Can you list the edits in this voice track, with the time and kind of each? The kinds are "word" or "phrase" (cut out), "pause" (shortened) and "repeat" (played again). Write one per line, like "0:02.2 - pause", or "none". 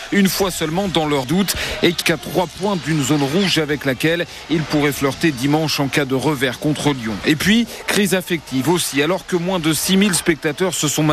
0:01.2 - phrase
0:02.0 - phrase

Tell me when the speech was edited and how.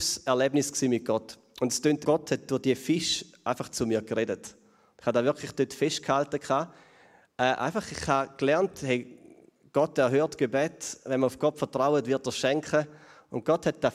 0:02.0 - phrase

